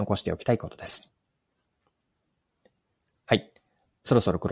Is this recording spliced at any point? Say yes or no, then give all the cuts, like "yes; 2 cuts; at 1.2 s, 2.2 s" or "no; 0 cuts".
no; 0 cuts